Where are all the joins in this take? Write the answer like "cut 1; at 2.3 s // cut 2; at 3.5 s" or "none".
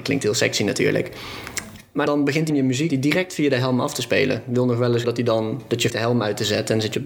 cut 1; at 2.1 s // cut 2; at 2.5 s // cut 3; at 2.9 s // cut 4; at 5.0 s // cut 5; at 5.9 s